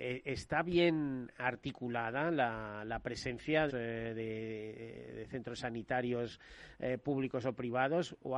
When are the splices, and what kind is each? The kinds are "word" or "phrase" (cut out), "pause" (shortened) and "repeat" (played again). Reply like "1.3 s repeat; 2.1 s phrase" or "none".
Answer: 3.7 s phrase